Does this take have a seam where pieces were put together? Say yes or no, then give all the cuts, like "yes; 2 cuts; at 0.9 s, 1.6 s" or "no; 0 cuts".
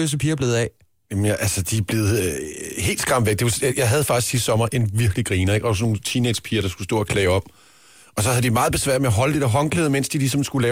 no; 0 cuts